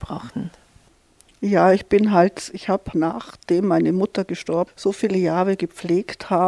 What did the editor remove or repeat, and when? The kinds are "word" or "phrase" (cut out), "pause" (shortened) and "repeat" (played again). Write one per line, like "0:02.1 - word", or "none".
0:02.9 - word
0:04.7 - phrase